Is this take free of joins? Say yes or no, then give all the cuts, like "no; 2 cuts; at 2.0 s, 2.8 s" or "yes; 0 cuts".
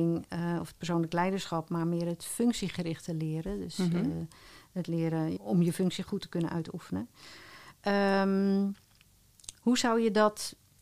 no; 1 cut; at 5.4 s